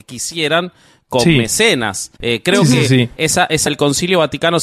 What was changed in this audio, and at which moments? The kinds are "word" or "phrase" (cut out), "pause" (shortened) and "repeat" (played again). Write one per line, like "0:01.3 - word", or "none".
0:02.2 - pause
0:03.2 - word
0:03.7 - word